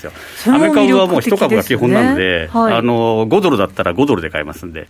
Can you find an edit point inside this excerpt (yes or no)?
no